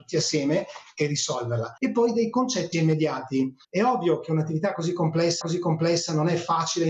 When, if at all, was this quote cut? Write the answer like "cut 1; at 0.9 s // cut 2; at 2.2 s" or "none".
cut 1; at 1.8 s // cut 2; at 2.7 s // cut 3; at 3.6 s // cut 4; at 5.4 s